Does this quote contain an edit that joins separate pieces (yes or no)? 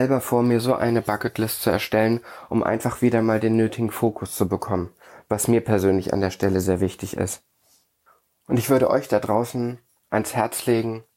no